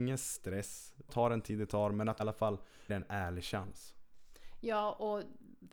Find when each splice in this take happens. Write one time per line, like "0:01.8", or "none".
0:01.1
0:02.2
0:02.9